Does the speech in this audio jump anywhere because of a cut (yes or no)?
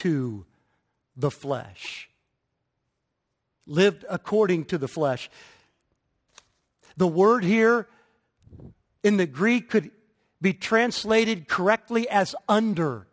no